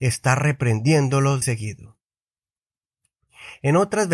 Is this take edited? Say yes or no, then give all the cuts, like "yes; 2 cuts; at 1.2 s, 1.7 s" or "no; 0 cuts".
yes; 1 cut; at 1.4 s